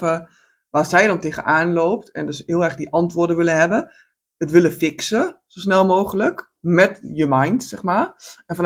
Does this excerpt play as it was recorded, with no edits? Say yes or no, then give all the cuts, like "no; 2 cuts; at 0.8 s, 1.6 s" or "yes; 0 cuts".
yes; 0 cuts